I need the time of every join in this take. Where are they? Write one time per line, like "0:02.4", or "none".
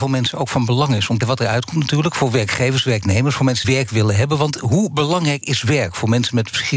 0:01.2
0:03.6